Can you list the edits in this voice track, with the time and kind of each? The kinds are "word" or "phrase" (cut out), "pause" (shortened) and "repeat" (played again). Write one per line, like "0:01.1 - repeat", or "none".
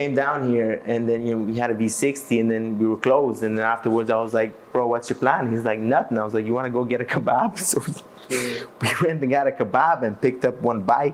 none